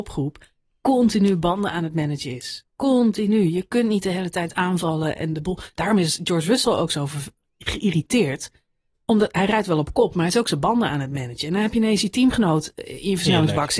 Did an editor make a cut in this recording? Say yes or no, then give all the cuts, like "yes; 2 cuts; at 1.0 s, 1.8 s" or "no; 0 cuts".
no; 0 cuts